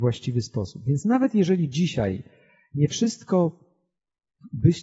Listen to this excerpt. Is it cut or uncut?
uncut